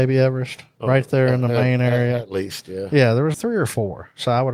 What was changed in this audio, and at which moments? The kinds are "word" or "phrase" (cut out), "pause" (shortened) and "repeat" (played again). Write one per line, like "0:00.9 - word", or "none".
0:03.3 - word